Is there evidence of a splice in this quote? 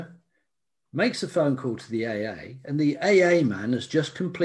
no; 0 cuts

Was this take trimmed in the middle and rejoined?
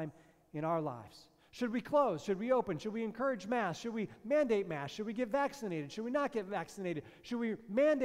no; 0 cuts

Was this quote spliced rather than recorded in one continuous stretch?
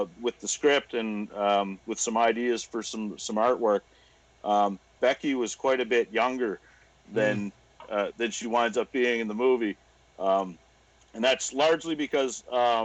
no; 0 cuts

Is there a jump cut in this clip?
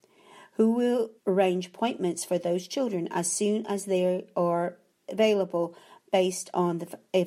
yes; 2 cuts; at 1.2 s, 5.0 s

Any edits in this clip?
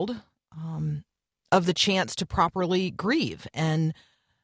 no; 0 cuts

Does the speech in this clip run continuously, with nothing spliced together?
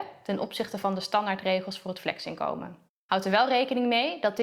no; 1 cut; at 2.9 s

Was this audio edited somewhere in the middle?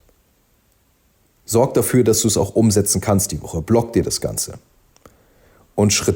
no; 0 cuts

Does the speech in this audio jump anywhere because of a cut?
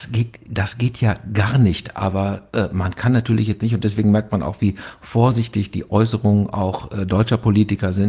no; 0 cuts

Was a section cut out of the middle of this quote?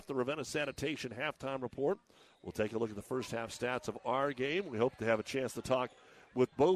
no; 0 cuts

